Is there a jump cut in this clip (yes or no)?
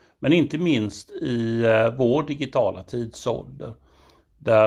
no